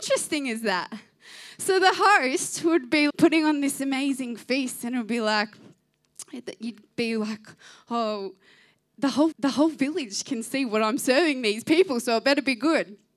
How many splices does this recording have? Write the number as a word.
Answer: two